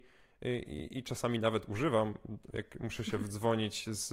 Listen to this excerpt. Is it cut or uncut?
uncut